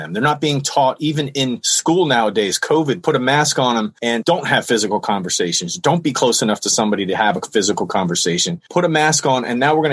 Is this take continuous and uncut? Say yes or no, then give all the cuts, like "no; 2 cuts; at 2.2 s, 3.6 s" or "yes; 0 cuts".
yes; 0 cuts